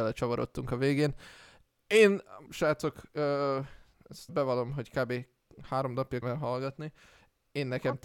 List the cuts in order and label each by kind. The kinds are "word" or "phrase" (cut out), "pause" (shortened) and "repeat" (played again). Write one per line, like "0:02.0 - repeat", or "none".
0:02.5 - word
0:04.3 - word
0:06.2 - word

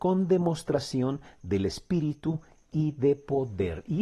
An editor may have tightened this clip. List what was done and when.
none

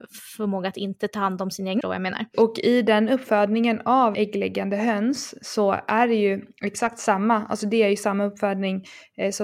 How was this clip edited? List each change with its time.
0:01.8 - phrase
0:04.1 - word

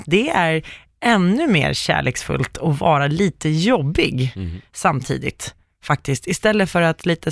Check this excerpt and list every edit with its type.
none

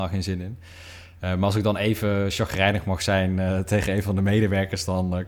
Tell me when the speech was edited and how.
none

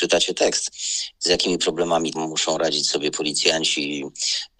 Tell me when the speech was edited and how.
0:02.1 - word

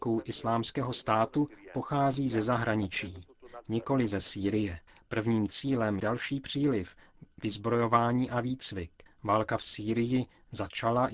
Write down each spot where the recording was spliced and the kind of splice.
0:04.9 - pause
0:06.0 - phrase
0:09.1 - pause

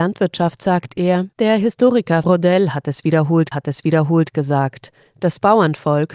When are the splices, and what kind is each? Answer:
0:01.3 - pause
0:02.2 - word
0:03.5 - repeat

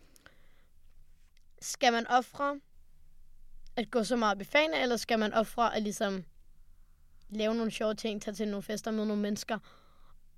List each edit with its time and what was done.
none

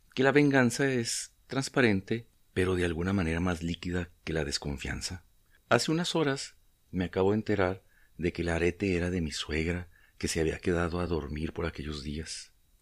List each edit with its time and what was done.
none

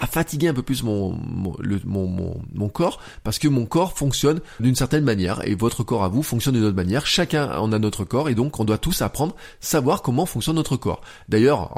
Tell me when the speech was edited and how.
0:04.6 - word

